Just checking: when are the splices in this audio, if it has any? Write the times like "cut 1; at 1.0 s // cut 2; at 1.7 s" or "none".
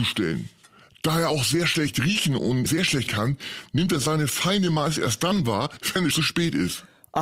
cut 1; at 2.7 s // cut 2; at 3.1 s // cut 3; at 6.1 s